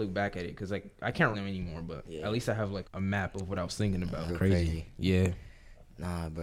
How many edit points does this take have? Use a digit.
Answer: 3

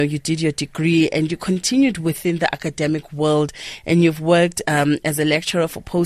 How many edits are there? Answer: 0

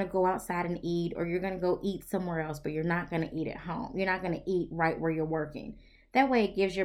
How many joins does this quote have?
0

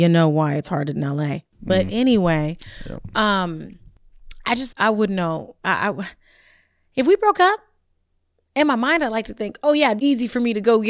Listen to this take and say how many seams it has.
3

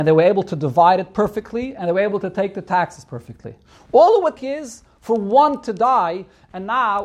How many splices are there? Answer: 1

